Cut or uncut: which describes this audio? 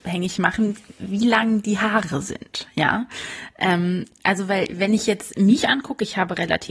uncut